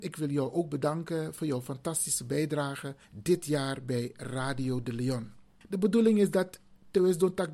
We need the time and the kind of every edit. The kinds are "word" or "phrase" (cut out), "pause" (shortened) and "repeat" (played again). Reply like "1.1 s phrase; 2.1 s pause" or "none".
3.0 s pause; 5.6 s pause

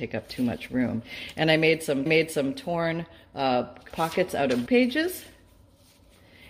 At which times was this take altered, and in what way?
2.1 s repeat; 3.9 s word; 4.7 s word

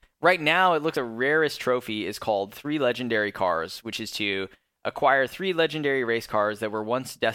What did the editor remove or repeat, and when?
0.9 s word

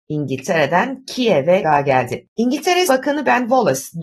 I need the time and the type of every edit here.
1.6 s phrase; 2.9 s word

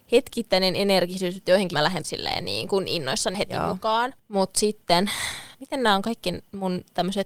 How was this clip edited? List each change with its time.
1.7 s word; 2.0 s word; 3.3 s word; 4.2 s pause; 5.5 s pause

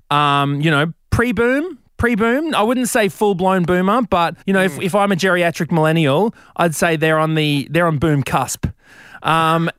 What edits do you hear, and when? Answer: 1.9 s pause; 4.4 s pause

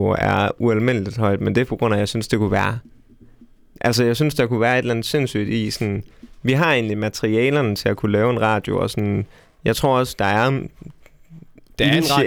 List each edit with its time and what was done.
none

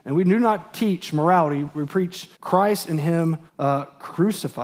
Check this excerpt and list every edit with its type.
2.3 s pause; 3.5 s pause

